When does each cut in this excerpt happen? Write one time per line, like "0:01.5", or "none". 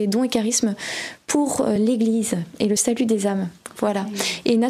none